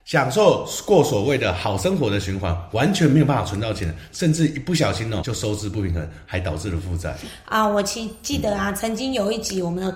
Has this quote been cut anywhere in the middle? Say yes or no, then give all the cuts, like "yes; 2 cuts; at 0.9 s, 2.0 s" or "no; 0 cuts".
yes; 1 cut; at 5.2 s